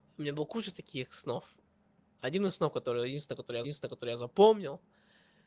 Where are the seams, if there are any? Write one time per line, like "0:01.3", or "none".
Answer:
0:03.6